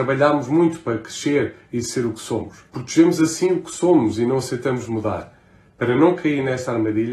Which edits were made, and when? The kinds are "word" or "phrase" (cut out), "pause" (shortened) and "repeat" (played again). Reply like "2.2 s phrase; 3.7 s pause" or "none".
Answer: 2.7 s pause